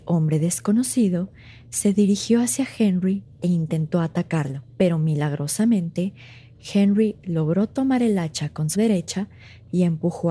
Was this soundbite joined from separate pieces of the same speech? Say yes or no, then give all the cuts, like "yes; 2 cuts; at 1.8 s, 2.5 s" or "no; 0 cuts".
yes; 2 cuts; at 4.7 s, 8.7 s